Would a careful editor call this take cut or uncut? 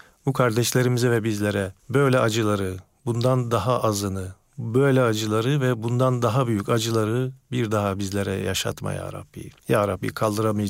cut